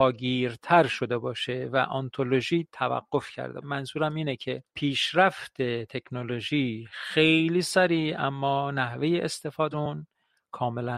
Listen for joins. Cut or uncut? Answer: cut